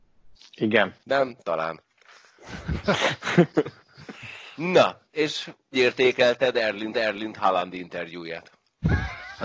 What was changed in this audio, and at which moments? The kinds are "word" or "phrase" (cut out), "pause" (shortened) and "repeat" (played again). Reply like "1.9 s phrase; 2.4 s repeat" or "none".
1.0 s pause; 5.7 s word; 6.9 s repeat